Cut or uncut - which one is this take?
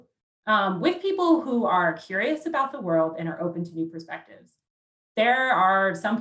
uncut